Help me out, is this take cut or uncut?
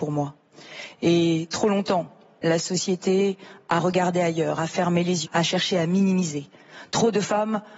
cut